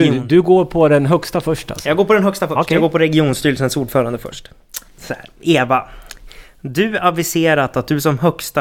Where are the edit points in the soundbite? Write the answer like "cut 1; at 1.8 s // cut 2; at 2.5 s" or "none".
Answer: cut 1; at 4.9 s